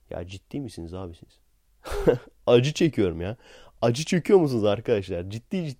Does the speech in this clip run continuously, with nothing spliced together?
yes; 0 cuts

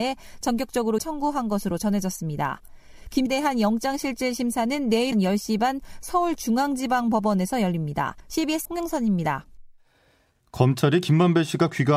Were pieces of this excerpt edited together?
yes; 4 cuts; at 1.0 s, 3.3 s, 5.1 s, 8.7 s

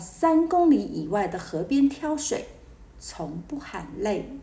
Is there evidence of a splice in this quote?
no; 0 cuts

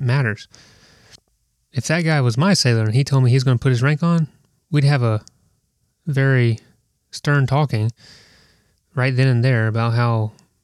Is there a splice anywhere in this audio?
no; 0 cuts

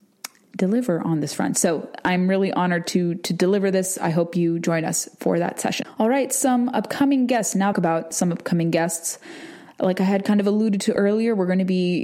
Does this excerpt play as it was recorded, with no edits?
no; 1 cut; at 7.7 s

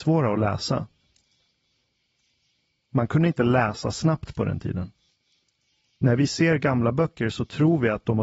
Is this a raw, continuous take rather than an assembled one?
yes; 0 cuts

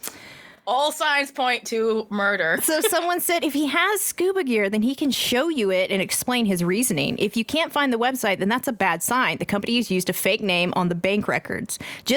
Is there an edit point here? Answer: no; 0 cuts

